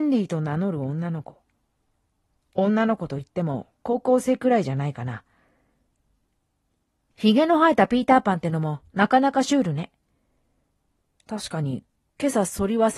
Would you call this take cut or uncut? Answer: uncut